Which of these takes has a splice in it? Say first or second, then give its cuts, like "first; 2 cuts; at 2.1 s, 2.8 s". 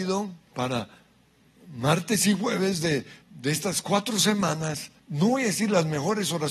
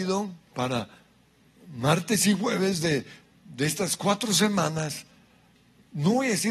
first; 2 cuts; at 3.2 s, 5.0 s